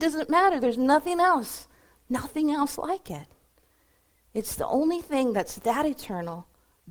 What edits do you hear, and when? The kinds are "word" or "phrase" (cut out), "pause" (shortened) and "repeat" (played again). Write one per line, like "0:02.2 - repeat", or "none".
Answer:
none